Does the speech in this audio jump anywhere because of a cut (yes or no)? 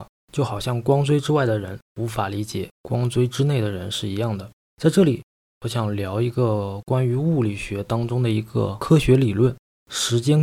no